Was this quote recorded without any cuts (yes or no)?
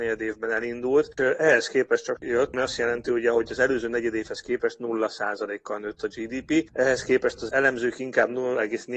no